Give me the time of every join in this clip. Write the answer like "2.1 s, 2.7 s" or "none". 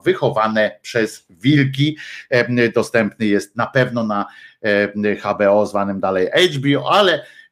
none